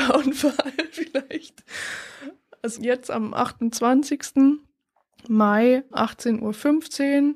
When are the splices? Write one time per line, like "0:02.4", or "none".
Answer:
0:02.8
0:05.9